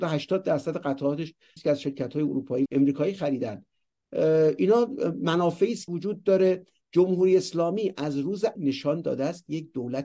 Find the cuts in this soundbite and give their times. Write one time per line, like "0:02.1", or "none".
0:01.6
0:02.7
0:05.9
0:08.6